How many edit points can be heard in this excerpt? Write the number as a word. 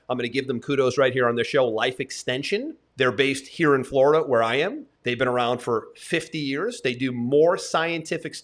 two